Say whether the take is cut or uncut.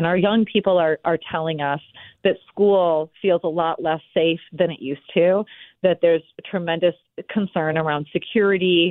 uncut